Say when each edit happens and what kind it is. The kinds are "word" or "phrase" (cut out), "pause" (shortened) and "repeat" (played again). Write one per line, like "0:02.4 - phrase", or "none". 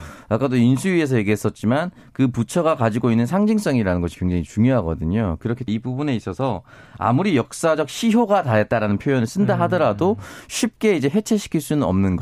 0:05.7 - word